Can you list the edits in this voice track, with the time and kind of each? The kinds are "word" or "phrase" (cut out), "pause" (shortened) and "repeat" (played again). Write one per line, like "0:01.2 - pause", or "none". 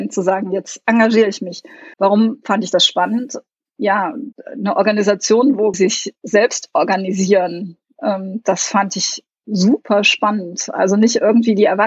0:01.9 - pause
0:04.3 - pause
0:05.7 - phrase